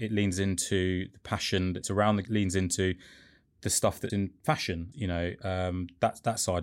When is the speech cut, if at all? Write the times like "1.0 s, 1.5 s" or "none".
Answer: 1.8 s, 2.2 s, 4.1 s, 4.9 s